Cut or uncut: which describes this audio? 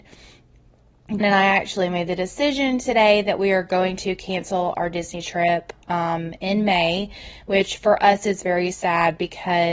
cut